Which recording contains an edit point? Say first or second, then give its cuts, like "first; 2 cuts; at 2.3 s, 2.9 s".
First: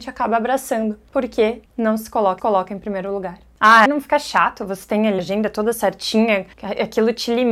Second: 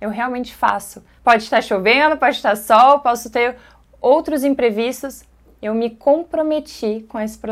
first; 5 cuts; at 1.7 s, 2.4 s, 3.9 s, 5.2 s, 6.5 s